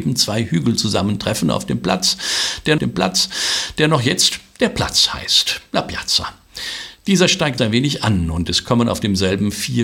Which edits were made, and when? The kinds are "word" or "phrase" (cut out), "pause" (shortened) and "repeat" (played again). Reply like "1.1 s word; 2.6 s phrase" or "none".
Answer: 2.8 s repeat; 7.6 s word